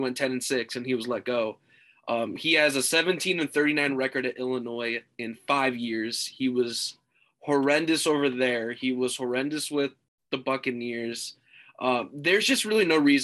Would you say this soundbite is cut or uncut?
cut